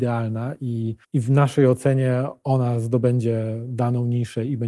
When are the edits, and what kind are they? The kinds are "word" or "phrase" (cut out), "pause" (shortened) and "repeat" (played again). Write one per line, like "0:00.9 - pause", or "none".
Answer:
0:01.0 - pause

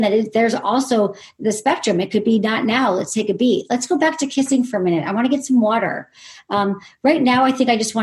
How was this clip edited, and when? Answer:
none

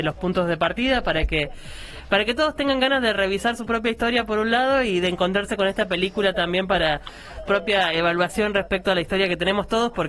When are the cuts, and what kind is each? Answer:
0:07.5 - phrase

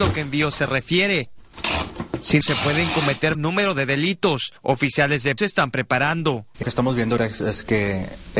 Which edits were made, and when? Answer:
0:02.4 - word
0:03.3 - word
0:05.4 - word
0:06.6 - word
0:07.2 - word

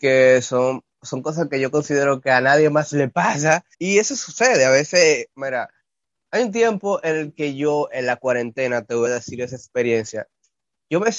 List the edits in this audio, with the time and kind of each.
0:03.7 - pause
0:05.3 - pause
0:09.1 - word

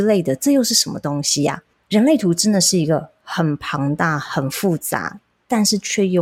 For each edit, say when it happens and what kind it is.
none

